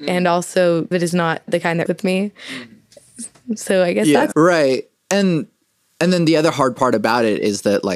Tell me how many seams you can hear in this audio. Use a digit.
4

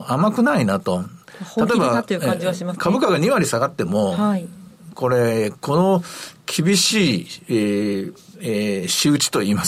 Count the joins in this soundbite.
1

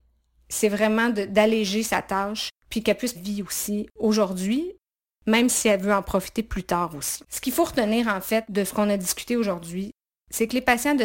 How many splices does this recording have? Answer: 3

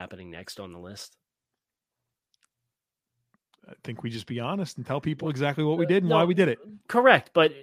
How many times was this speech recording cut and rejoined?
0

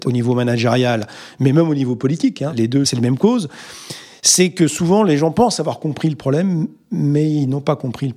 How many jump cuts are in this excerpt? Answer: 0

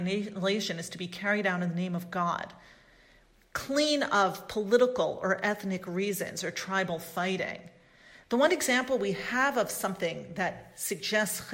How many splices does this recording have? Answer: 0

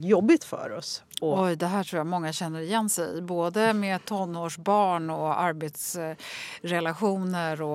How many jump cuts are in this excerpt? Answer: 0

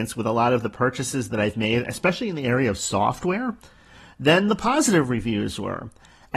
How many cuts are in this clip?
0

